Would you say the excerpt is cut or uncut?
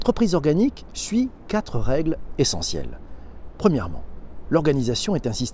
uncut